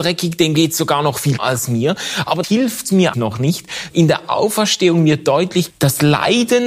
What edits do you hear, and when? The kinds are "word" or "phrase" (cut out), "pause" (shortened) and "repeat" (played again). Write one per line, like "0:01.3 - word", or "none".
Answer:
0:01.4 - word
0:02.4 - word
0:03.1 - word
0:03.9 - word
0:05.7 - word